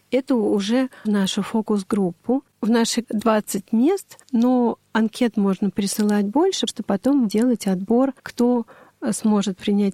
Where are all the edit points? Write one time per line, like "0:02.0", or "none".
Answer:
0:01.0
0:02.5
0:03.0
0:04.2
0:06.7
0:07.3
0:08.2